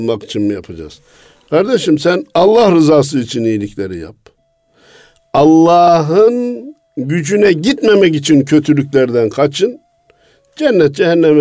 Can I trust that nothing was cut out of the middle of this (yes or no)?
yes